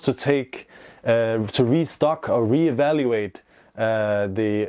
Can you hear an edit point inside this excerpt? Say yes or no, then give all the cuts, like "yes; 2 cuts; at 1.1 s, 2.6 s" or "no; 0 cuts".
no; 0 cuts